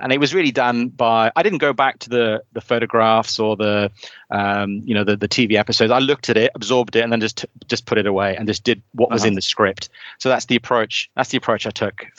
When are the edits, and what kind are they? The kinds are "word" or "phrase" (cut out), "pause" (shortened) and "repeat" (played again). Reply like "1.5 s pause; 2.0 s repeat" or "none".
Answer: none